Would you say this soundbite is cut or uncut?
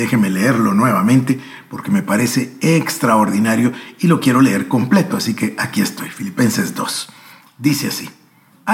uncut